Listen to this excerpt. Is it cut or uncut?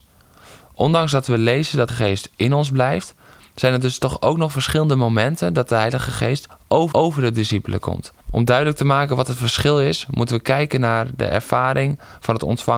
cut